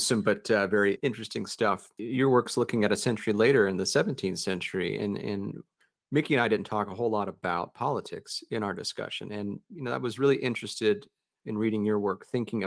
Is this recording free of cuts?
yes; 0 cuts

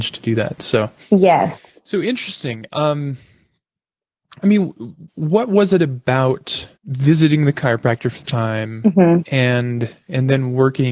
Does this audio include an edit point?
yes; 3 cuts; at 5.1 s, 6.8 s, 8.2 s

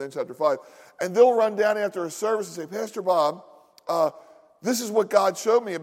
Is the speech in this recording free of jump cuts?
yes; 0 cuts

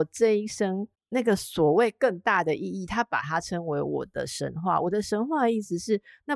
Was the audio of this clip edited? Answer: yes; 1 cut; at 0.9 s

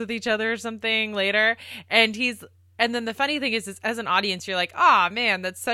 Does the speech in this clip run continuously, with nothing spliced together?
yes; 0 cuts

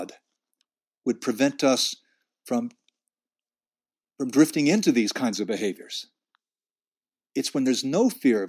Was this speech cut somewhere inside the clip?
no; 0 cuts

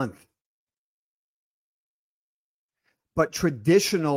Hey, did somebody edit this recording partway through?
no; 0 cuts

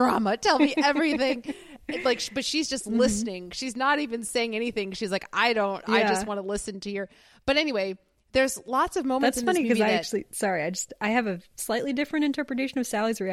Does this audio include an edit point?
no; 0 cuts

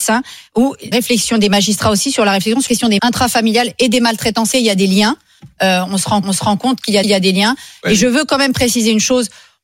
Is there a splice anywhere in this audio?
yes; 6 cuts; at 0.9 s, 2.7 s, 3.0 s, 4.5 s, 6.2 s, 7.0 s

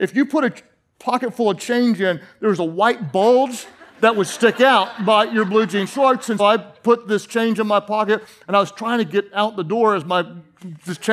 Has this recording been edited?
yes; 1 cut; at 6.4 s

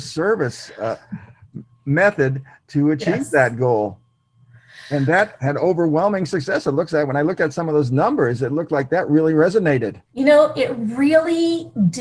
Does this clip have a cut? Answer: yes; 1 cut; at 10.0 s

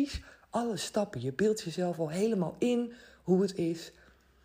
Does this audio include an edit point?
no; 0 cuts

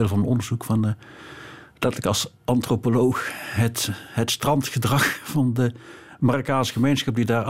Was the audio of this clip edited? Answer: yes; 1 cut; at 2.4 s

